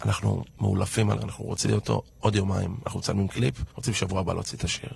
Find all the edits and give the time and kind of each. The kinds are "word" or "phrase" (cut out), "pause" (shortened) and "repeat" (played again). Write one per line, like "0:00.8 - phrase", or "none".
0:01.2 - word
0:01.7 - word
0:02.1 - pause
0:03.7 - pause